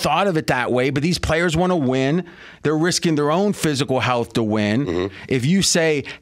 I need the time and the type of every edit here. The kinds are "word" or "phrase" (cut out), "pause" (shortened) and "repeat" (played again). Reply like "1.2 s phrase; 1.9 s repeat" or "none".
none

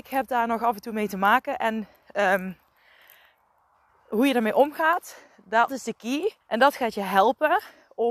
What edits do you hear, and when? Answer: 5.7 s word; 6.4 s pause

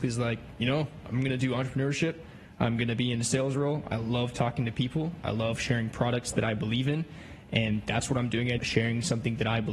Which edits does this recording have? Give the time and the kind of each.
8.6 s word

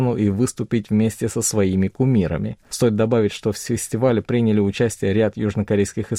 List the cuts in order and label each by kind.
2.6 s pause

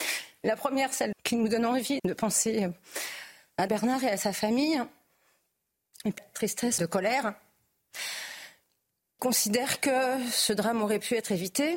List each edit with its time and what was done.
1.1 s word; 2.0 s word; 3.7 s word; 6.2 s word; 6.8 s word; 9.2 s word

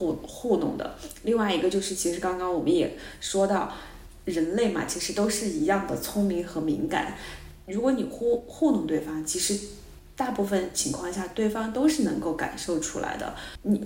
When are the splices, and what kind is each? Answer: none

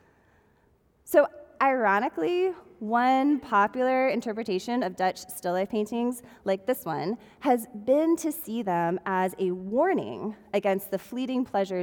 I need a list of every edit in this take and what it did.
none

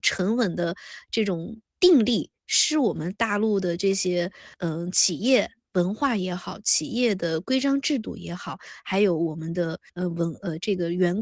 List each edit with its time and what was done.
1.7 s pause; 2.4 s pause; 4.5 s pause; 9.9 s pause

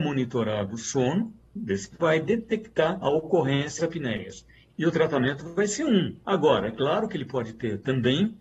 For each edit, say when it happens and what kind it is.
1.9 s phrase; 3.0 s word; 3.8 s word; 6.2 s pause

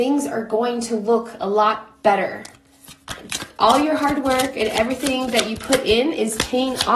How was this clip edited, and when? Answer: none

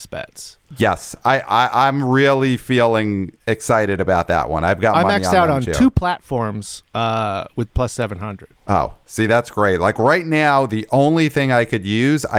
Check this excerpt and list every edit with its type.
3.4 s pause; 7.7 s phrase; 8.6 s pause

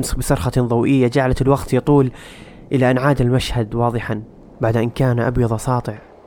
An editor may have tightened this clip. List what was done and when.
none

